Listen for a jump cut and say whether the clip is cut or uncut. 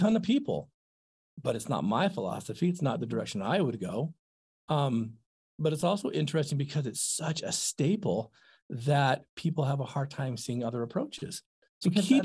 uncut